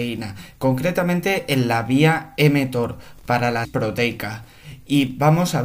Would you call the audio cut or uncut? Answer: cut